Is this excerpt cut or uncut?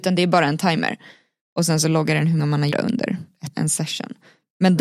cut